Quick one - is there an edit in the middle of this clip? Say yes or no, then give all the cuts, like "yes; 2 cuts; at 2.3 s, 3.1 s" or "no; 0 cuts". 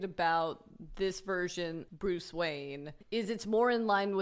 yes; 2 cuts; at 1.9 s, 3.0 s